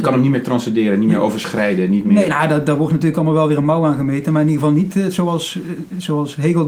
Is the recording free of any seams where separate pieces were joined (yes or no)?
yes